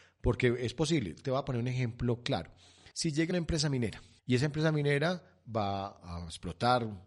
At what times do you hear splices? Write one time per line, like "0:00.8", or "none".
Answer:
0:02.9
0:03.3